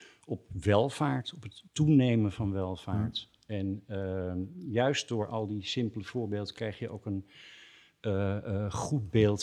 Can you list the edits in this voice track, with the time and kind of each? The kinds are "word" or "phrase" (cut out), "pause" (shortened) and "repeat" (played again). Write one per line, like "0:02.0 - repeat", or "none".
0:01.7 - pause